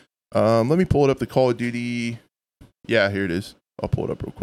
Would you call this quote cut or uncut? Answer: uncut